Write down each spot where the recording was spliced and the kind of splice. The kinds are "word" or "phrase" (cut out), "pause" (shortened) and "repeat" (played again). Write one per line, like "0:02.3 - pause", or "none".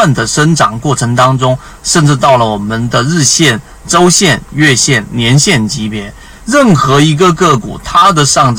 none